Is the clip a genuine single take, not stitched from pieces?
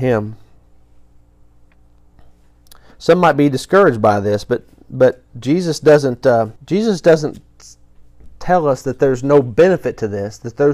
no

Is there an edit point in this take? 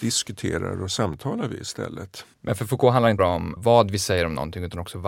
yes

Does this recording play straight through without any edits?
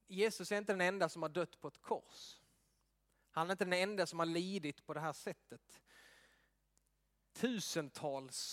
yes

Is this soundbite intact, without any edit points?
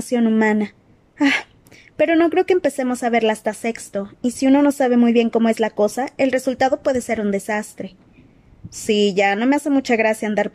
yes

